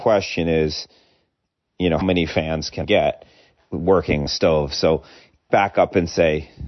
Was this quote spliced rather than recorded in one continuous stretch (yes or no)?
yes